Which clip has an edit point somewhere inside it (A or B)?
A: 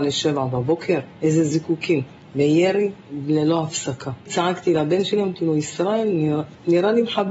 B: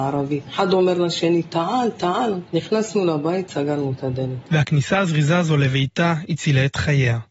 B